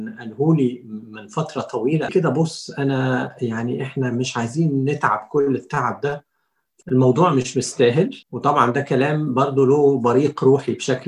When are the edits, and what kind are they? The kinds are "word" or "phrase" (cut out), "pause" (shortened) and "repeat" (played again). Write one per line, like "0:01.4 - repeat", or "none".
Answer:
0:02.1 - phrase
0:06.8 - word
0:08.2 - pause

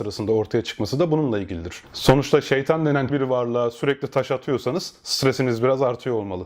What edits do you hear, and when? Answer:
0:03.1 - word

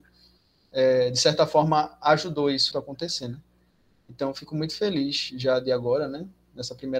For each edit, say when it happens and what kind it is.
0:02.7 - word

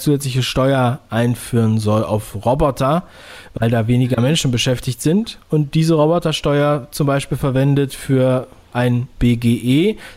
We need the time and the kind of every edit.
none

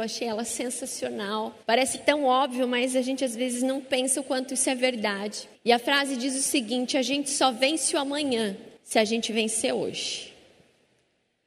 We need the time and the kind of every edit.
0:01.6 - pause
0:05.5 - pause
0:08.8 - pause

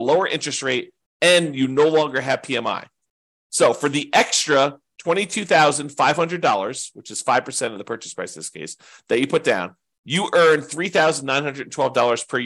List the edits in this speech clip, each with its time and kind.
none

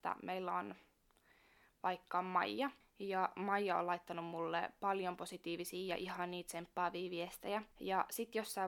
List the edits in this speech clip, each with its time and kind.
none

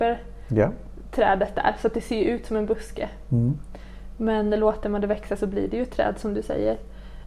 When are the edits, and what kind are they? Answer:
none

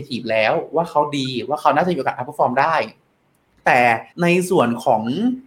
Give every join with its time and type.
0:04.1 - pause

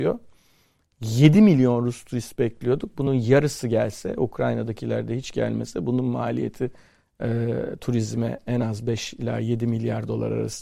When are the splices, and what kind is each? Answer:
none

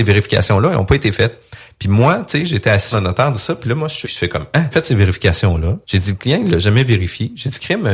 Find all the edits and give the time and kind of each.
0:02.9 - phrase
0:04.0 - word
0:04.7 - phrase
0:05.8 - pause

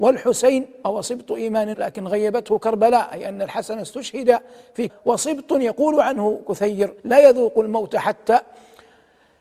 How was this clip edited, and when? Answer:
0:01.7 - word
0:04.9 - word
0:07.0 - pause

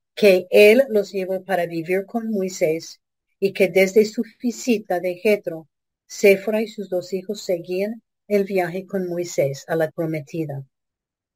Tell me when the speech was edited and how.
0:09.9 - word

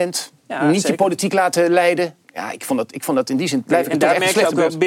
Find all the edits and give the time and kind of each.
0:02.2 - pause

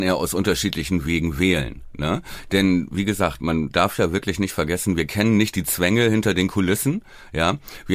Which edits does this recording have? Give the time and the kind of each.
none

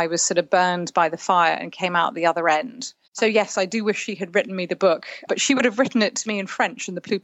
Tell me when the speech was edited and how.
0:03.0 - pause
0:05.3 - word

